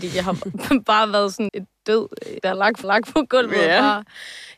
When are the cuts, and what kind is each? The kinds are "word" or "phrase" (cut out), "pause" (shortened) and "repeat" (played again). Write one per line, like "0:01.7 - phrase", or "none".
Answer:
0:01.5 - word
0:02.4 - word
0:02.8 - repeat

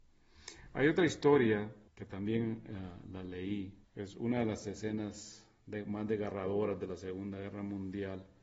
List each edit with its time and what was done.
0:01.9 - pause
0:03.8 - pause

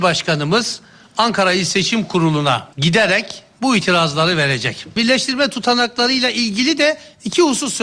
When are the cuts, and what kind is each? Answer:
0:02.7 - pause

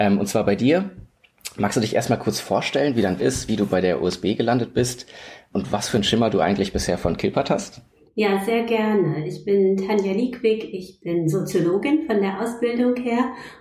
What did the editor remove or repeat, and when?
0:03.2 - word
0:05.5 - word

